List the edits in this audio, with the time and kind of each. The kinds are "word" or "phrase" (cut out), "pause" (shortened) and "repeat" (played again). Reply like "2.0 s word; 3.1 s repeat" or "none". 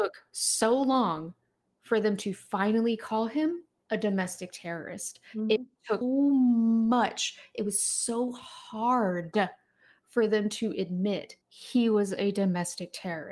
6.0 s word; 11.4 s pause